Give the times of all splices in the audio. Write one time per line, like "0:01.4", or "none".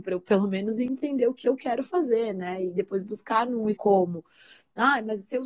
0:03.7